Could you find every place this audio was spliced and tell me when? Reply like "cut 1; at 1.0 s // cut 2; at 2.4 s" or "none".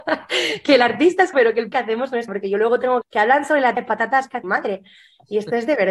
cut 1; at 1.3 s // cut 2; at 1.7 s // cut 3; at 2.3 s // cut 4; at 3.0 s // cut 5; at 3.8 s // cut 6; at 4.4 s